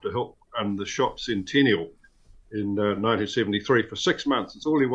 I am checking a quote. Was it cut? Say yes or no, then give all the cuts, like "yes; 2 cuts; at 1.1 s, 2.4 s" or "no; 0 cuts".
no; 0 cuts